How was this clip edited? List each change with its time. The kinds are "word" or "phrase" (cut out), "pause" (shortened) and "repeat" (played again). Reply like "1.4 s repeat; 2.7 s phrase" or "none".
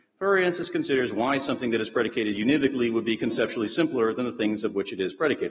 none